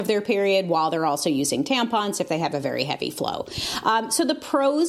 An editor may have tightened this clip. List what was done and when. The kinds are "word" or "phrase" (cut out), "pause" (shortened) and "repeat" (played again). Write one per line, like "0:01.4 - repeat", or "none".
none

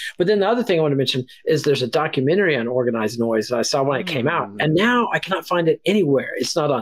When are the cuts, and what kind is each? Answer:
none

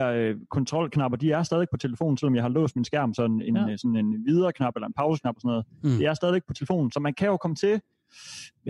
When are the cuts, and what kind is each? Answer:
none

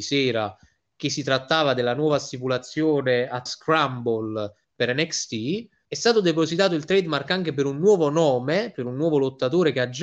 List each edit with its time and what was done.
0:03.5 - word
0:04.6 - pause
0:05.8 - pause

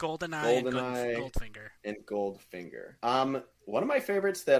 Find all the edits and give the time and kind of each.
0:01.8 - pause
0:03.0 - pause

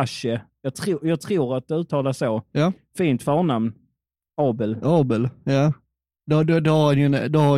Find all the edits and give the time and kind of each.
none

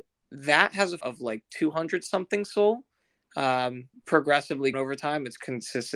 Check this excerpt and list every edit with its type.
0:01.0 - word
0:03.9 - word
0:04.7 - word

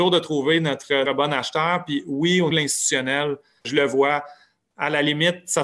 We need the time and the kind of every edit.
0:01.1 - word
0:02.5 - word
0:03.6 - word

